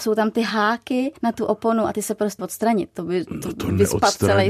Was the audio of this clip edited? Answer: yes; 2 cuts; at 1.2 s, 2.4 s

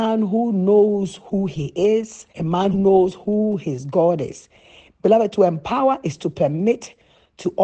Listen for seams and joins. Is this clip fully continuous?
no; 2 cuts; at 2.3 s, 2.7 s

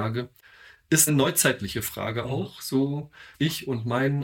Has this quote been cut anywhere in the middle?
yes; 2 cuts; at 1.1 s, 3.3 s

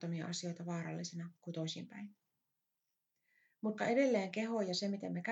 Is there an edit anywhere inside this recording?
yes; 2 cuts; at 1.4 s, 3.8 s

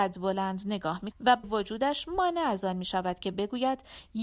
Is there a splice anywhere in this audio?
yes; 2 cuts; at 1.1 s, 1.4 s

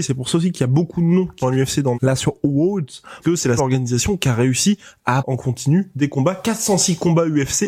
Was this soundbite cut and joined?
yes; 5 cuts; at 1.4 s, 1.9 s, 3.2 s, 3.6 s, 5.2 s

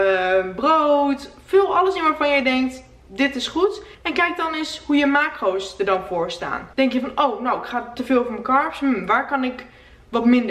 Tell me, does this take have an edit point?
yes; 2 cuts; at 3.9 s, 6.7 s

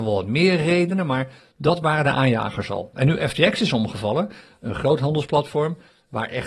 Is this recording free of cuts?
yes; 0 cuts

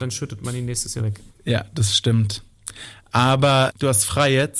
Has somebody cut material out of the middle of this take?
yes; 3 cuts; at 1.0 s, 1.3 s, 3.7 s

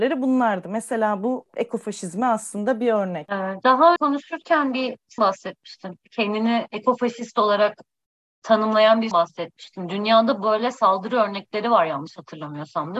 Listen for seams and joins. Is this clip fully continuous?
no; 3 cuts; at 4.0 s, 5.2 s, 9.1 s

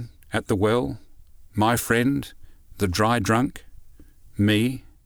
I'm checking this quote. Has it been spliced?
no; 0 cuts

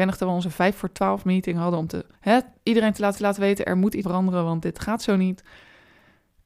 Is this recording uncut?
no; 3 cuts; at 2.1 s, 3.1 s, 4.0 s

